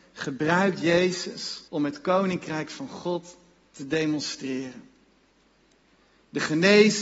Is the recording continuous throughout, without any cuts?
no; 1 cut; at 1.7 s

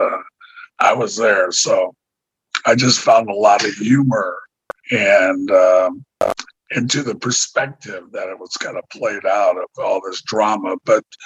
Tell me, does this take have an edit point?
yes; 1 cut; at 4.8 s

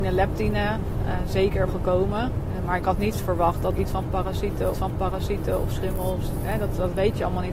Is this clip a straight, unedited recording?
no; 3 cuts; at 1.7 s, 3.8 s, 4.7 s

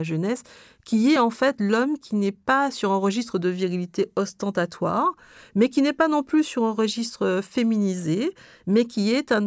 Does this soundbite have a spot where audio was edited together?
no; 0 cuts

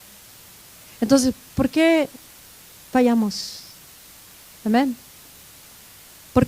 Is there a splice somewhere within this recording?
no; 0 cuts

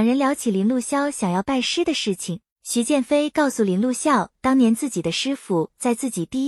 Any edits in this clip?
yes; 1 cut; at 2.5 s

